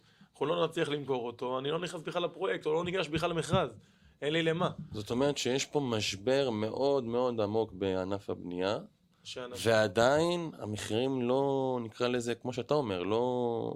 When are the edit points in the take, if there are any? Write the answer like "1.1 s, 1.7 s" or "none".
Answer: none